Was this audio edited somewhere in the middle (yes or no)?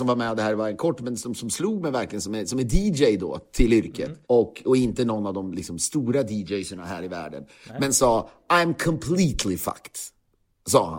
yes